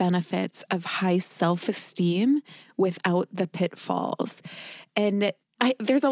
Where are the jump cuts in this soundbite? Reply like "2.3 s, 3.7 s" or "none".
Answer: none

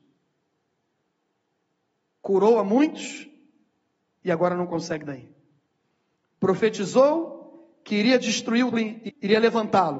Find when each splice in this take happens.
5.1 s, 8.7 s, 9.1 s

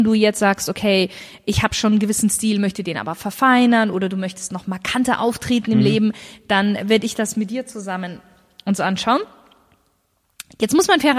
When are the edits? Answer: none

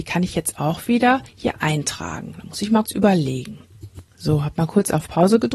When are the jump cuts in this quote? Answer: 1.3 s, 2.9 s, 4.1 s

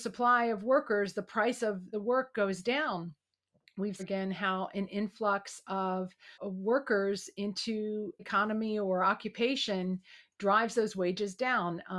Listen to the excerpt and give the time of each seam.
1.9 s, 4.0 s, 6.3 s, 8.2 s

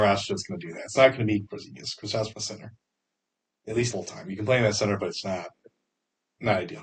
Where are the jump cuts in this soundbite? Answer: 1.5 s, 2.3 s, 3.1 s, 3.9 s, 5.2 s

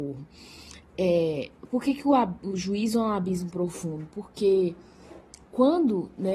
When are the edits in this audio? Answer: none

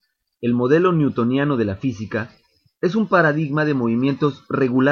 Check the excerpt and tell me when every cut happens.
none

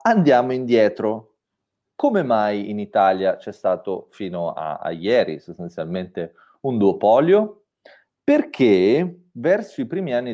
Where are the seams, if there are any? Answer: none

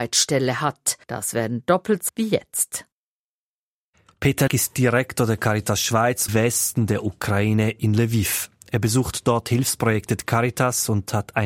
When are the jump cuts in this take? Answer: 1.0 s, 2.1 s, 4.5 s, 6.3 s

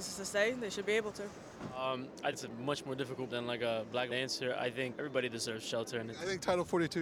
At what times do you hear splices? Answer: 2.3 s, 3.3 s, 4.1 s, 4.9 s

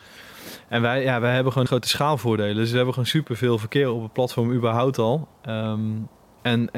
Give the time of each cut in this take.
1.7 s

